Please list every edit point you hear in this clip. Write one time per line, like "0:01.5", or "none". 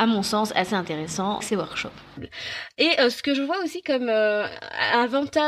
0:01.4